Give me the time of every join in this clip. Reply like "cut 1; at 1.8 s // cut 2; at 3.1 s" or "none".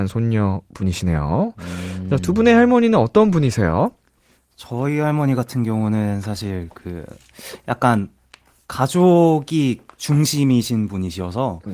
none